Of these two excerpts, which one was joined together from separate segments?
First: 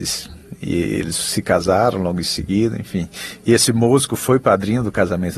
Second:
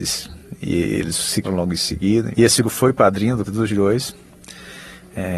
second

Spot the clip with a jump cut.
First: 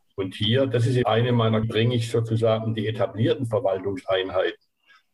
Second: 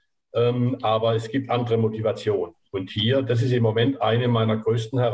first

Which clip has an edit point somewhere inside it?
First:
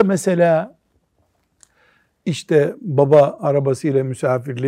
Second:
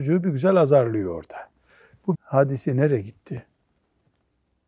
second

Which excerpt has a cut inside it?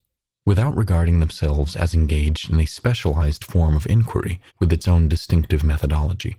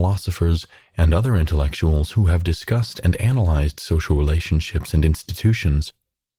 first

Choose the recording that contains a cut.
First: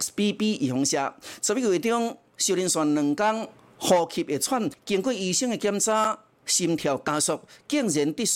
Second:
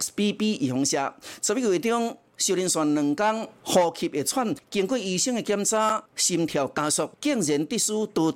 second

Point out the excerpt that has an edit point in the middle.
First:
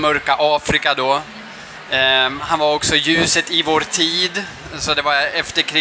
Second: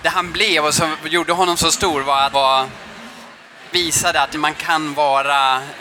second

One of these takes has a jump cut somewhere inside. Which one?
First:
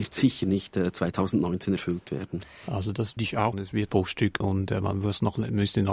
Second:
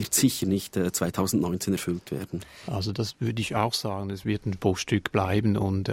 first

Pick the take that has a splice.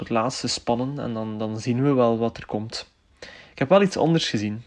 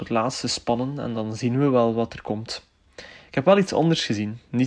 second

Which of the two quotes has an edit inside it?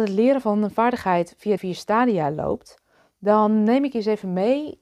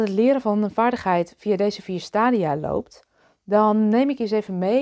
first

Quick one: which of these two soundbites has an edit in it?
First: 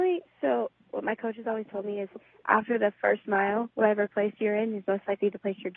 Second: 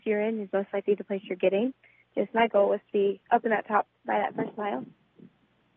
second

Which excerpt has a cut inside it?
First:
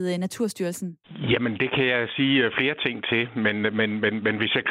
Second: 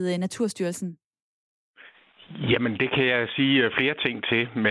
first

